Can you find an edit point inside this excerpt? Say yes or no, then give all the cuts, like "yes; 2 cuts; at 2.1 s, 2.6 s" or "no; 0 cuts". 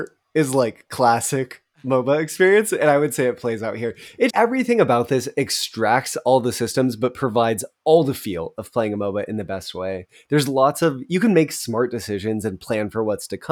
yes; 1 cut; at 4.3 s